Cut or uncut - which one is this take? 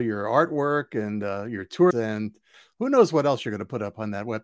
cut